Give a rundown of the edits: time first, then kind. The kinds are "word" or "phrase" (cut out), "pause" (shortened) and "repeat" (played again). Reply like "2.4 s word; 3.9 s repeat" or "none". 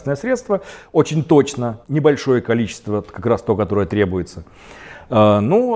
1.8 s pause